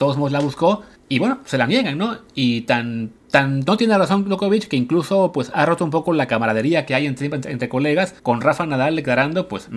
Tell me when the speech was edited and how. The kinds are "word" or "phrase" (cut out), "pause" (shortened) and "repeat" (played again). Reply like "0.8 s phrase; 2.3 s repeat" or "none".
0.9 s pause; 3.2 s pause; 8.2 s pause